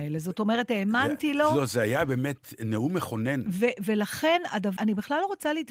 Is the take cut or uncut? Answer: cut